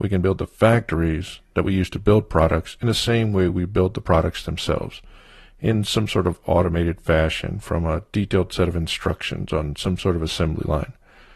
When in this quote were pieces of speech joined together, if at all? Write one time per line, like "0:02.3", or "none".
none